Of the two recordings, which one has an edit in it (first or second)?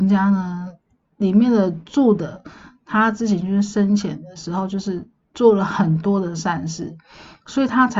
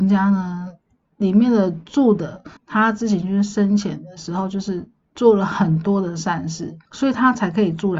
second